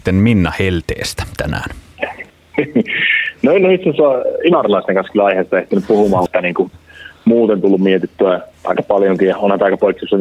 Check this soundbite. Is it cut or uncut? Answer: cut